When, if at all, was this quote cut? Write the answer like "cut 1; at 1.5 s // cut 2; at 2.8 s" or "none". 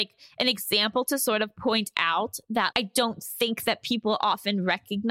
cut 1; at 2.7 s